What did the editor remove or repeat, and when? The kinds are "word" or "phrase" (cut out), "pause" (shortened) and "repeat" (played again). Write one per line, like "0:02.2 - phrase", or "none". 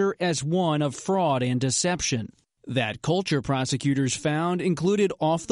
none